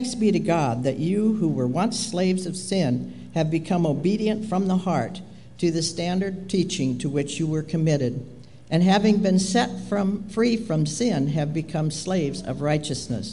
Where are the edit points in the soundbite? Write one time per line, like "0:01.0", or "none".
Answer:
none